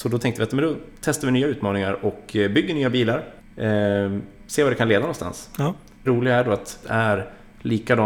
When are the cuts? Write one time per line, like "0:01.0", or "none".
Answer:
0:03.4
0:06.1
0:06.8